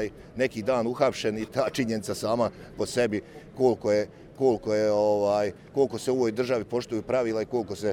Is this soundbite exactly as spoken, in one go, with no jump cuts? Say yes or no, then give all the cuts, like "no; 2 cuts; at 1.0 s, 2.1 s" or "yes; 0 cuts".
no; 2 cuts; at 1.5 s, 2.7 s